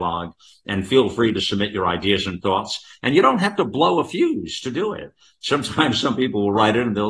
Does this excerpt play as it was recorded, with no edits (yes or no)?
yes